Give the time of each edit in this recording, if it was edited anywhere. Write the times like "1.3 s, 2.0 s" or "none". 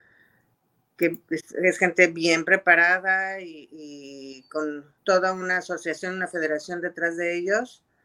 5.0 s